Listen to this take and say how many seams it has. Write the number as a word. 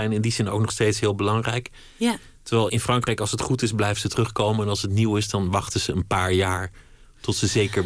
one